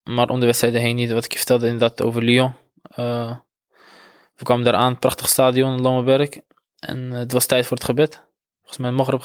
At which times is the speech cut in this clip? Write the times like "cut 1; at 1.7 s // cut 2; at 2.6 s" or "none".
none

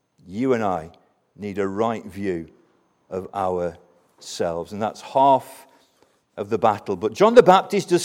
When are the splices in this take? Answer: none

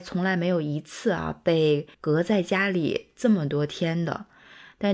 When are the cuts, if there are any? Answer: cut 1; at 1.9 s

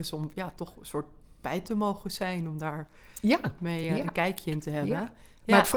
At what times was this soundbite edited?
none

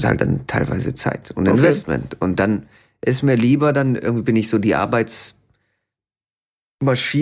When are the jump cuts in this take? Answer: none

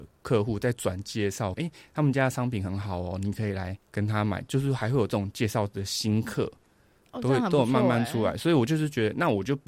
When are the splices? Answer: cut 1; at 1.5 s // cut 2; at 3.8 s

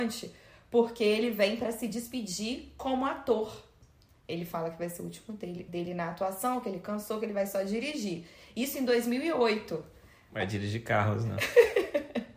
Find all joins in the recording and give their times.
cut 1; at 5.7 s

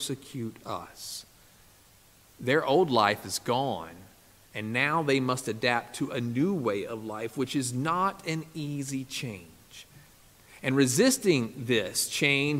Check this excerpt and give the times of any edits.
none

